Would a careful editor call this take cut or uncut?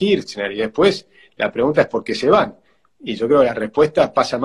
uncut